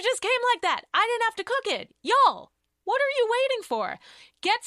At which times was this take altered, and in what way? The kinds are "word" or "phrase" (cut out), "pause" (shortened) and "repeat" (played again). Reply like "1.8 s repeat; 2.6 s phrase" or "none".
none